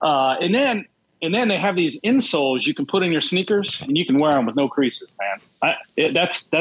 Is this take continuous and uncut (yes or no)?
yes